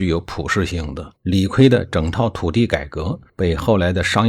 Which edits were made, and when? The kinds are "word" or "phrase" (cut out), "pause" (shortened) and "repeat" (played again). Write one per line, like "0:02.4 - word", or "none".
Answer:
0:01.2 - pause
0:03.3 - pause